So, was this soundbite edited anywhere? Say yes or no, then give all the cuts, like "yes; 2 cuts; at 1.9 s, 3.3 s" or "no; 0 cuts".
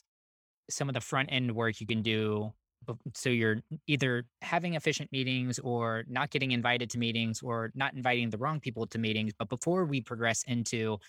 no; 0 cuts